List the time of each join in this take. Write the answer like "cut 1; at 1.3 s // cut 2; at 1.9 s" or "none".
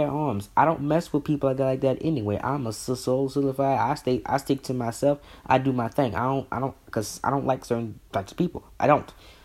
none